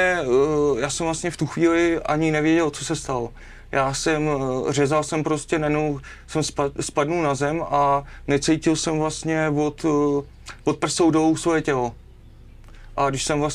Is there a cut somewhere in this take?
no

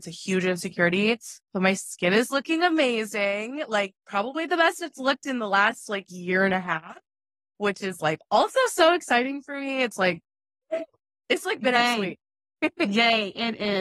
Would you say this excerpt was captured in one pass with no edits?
yes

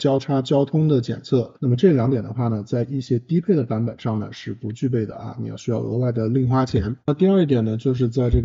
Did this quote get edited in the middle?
yes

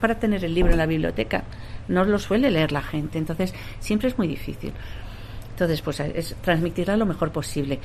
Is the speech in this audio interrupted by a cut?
no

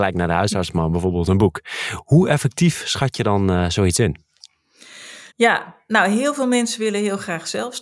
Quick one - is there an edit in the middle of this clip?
yes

